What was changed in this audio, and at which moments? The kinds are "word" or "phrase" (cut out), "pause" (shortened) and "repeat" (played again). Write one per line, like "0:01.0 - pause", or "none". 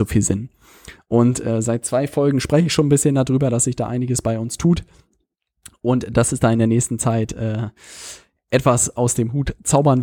none